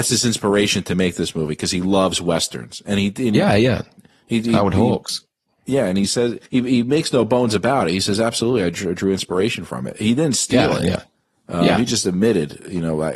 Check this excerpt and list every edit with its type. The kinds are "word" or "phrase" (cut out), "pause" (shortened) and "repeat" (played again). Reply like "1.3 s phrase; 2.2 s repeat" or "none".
6.5 s pause